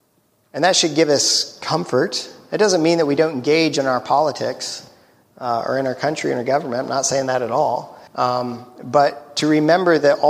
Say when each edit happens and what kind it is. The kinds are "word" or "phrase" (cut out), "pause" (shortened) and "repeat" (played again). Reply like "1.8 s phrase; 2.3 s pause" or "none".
8.1 s pause